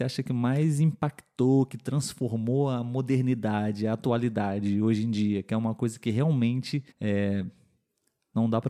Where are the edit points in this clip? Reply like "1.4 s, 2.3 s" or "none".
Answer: 6.9 s